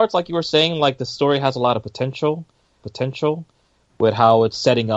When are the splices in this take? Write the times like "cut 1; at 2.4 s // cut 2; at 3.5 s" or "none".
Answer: cut 1; at 2.8 s